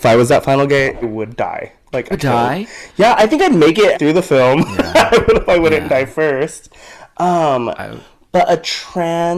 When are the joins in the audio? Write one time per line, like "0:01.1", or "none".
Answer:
0:01.0
0:02.1
0:03.9
0:05.5